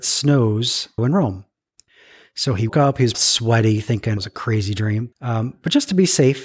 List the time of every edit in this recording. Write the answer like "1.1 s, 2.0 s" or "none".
1.0 s, 2.7 s, 3.1 s, 4.2 s, 5.1 s